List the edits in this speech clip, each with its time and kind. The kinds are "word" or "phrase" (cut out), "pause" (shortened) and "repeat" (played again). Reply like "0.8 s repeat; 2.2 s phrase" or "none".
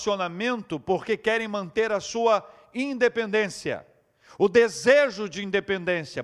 none